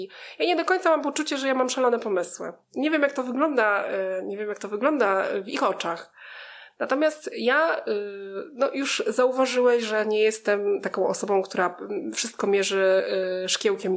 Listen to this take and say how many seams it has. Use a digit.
0